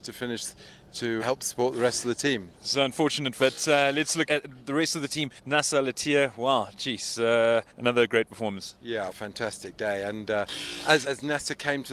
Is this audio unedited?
no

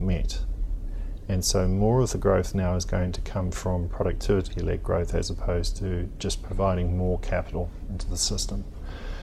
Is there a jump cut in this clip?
no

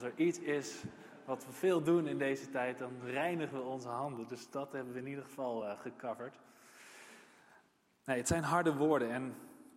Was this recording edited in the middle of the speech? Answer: no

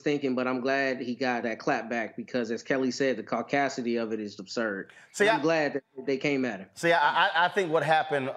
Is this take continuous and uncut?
no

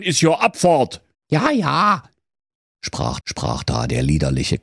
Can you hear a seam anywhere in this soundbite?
yes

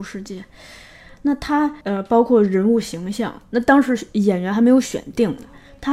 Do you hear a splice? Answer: yes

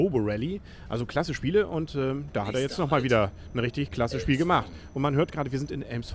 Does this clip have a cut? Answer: no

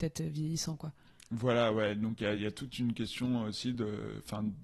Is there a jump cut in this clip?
no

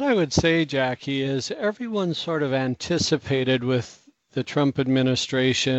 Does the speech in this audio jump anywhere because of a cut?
no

